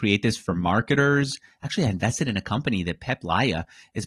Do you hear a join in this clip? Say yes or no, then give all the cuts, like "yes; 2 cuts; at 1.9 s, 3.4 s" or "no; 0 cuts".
no; 0 cuts